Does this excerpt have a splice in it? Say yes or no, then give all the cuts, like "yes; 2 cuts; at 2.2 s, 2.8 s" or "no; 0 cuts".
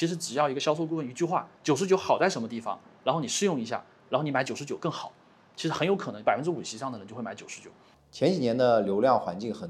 no; 0 cuts